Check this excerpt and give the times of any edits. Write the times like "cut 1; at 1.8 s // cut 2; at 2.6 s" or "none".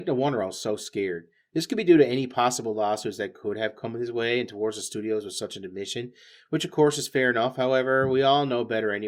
none